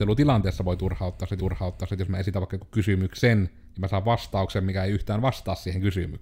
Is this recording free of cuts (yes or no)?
no